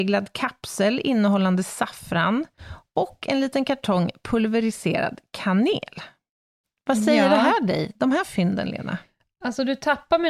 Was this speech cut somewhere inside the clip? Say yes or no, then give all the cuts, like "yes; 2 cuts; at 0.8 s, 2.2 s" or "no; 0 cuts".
no; 0 cuts